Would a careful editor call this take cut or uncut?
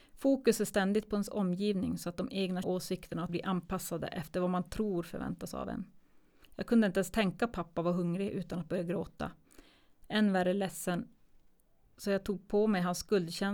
cut